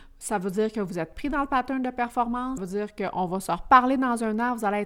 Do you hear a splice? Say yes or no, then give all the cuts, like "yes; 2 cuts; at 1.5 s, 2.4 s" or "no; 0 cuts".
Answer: yes; 1 cut; at 2.6 s